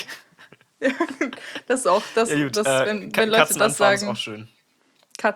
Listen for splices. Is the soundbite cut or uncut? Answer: uncut